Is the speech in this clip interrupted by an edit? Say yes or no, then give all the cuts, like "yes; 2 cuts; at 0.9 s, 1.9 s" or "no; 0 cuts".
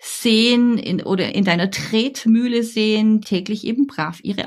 yes; 2 cuts; at 1.3 s, 3.2 s